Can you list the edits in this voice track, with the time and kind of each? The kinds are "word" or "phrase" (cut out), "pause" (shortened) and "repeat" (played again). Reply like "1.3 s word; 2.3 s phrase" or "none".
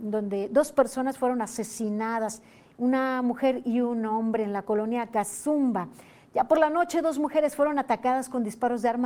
none